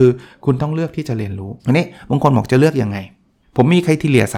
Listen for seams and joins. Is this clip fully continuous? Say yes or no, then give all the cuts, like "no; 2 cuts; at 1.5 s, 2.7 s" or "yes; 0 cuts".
no; 2 cuts; at 1.6 s, 3.4 s